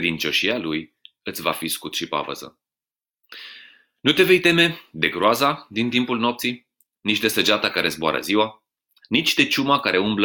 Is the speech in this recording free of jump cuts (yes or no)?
yes